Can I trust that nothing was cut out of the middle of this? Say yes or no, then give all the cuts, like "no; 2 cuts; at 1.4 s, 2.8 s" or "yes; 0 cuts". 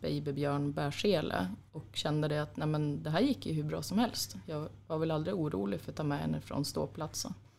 yes; 0 cuts